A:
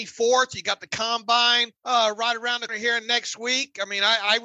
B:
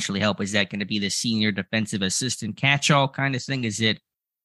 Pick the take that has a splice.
A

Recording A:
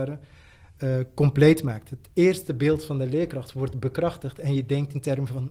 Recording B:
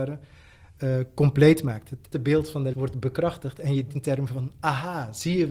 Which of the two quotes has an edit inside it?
B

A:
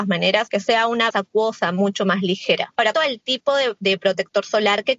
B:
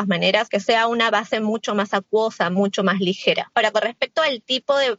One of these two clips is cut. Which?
A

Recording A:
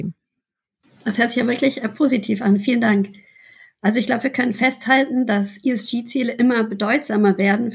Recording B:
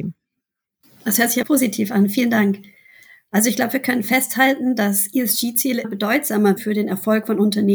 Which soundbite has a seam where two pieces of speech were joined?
B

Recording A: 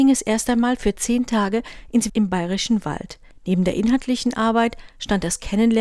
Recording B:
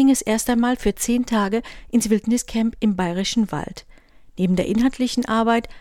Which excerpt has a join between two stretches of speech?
A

